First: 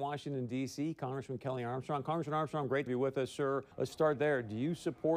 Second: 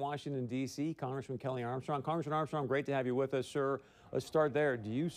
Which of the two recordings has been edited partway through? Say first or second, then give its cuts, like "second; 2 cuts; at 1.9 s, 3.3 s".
first; 2 cuts; at 2.9 s, 3.7 s